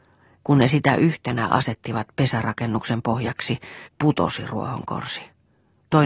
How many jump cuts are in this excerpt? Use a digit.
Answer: 1